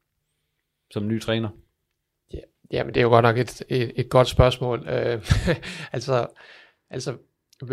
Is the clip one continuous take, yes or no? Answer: yes